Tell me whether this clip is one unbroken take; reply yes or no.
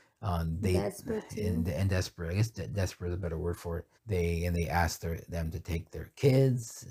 no